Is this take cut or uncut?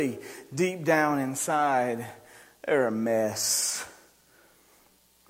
uncut